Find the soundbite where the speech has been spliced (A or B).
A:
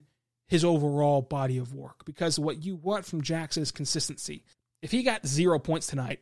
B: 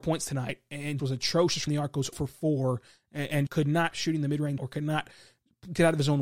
B